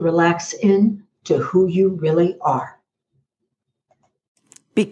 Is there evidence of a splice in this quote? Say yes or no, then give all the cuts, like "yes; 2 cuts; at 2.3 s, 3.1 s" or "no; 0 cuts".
no; 0 cuts